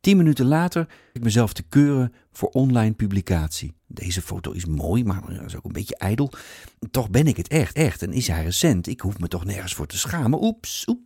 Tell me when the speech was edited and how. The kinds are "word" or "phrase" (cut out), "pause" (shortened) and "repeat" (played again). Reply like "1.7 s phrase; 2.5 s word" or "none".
1.2 s word; 3.8 s pause; 7.7 s repeat